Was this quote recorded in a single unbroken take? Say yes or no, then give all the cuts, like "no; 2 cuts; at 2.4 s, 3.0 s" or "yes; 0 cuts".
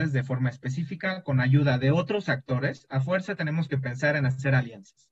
yes; 0 cuts